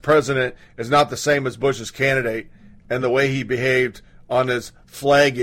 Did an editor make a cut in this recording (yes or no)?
no